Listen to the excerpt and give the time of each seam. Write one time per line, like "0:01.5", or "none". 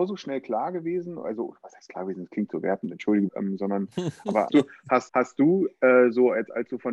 0:03.3
0:04.5
0:05.1